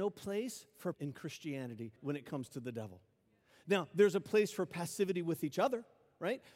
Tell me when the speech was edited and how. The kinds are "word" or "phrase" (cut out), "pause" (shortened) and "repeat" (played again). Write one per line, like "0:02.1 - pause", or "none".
0:00.9 - word
0:02.0 - pause